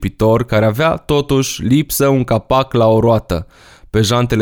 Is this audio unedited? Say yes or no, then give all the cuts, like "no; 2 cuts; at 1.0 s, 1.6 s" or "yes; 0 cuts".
yes; 0 cuts